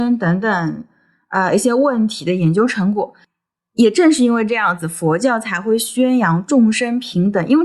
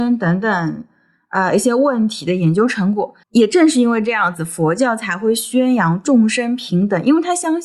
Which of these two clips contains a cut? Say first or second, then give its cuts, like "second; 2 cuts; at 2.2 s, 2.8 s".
second; 1 cut; at 3.2 s